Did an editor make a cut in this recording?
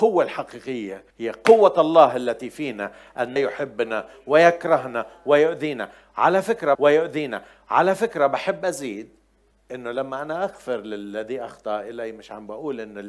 yes; 4 cuts; at 1.1 s, 3.4 s, 6.7 s, 9.5 s

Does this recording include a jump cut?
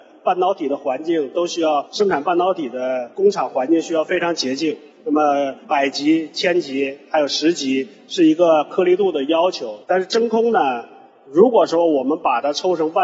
yes; 1 cut; at 9.8 s

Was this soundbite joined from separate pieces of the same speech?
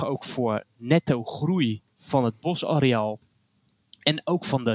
no; 0 cuts

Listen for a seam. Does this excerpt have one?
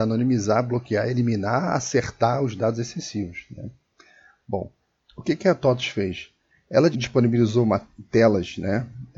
yes; 2 cuts; at 5.0 s, 6.9 s

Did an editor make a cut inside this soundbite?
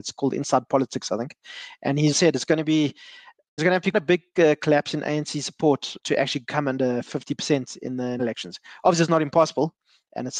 yes; 5 cuts; at 2.1 s, 3.6 s, 3.9 s, 6.0 s, 8.2 s

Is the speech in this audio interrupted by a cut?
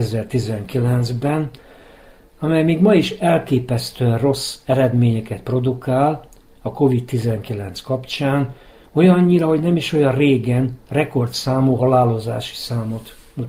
no; 0 cuts

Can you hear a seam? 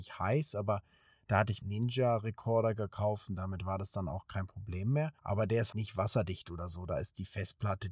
yes; 3 cuts; at 1.6 s, 5.2 s, 5.7 s

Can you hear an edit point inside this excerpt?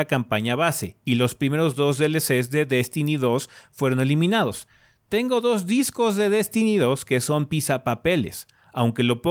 no; 0 cuts

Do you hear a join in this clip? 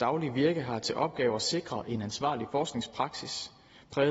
no; 0 cuts

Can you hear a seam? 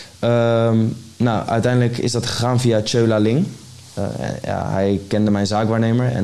no; 0 cuts

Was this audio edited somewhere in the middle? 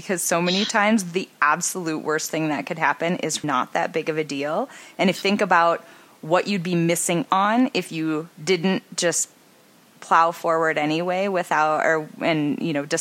yes; 4 cuts; at 3.4 s, 5.1 s, 7.3 s, 8.3 s

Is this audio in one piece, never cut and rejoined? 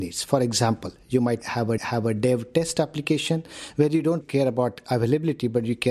no; 2 cuts; at 1.8 s, 4.2 s

